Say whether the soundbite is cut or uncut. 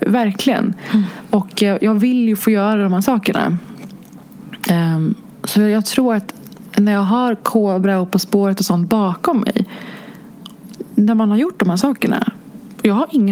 uncut